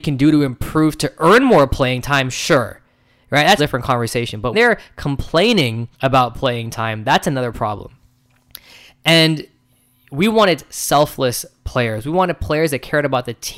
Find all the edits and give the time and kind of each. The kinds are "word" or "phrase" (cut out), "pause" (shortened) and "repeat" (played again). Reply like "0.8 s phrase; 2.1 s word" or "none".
3.6 s phrase; 4.5 s word; 5.9 s pause